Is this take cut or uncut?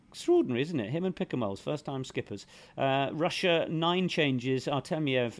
uncut